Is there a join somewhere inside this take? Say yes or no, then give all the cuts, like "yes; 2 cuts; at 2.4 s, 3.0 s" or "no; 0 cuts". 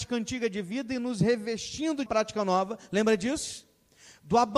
yes; 1 cut; at 2.1 s